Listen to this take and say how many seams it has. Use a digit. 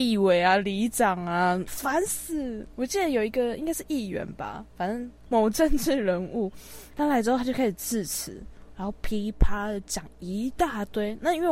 1